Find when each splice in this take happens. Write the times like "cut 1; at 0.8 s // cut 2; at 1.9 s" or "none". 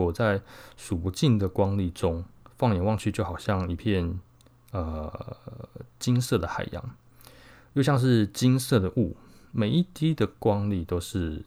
none